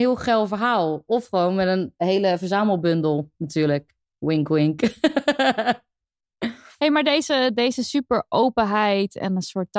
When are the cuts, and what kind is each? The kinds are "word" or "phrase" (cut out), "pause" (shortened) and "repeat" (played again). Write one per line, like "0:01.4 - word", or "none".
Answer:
none